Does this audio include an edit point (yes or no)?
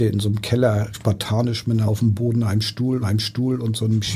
yes